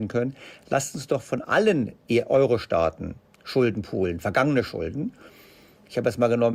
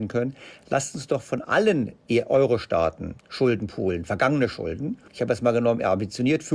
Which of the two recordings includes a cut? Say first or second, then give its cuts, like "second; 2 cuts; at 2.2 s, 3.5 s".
second; 2 cuts; at 3.2 s, 5.1 s